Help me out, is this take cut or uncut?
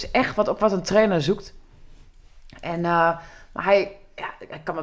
uncut